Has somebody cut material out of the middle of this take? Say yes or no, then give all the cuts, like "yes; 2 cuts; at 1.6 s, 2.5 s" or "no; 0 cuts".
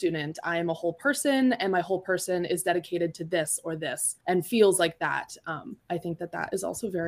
yes; 2 cuts; at 4.2 s, 5.8 s